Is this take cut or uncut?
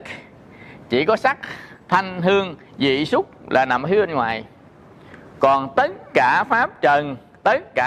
cut